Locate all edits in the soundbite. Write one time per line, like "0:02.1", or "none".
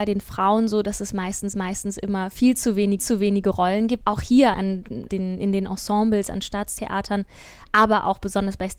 0:01.5
0:03.0
0:04.0
0:04.5
0:05.1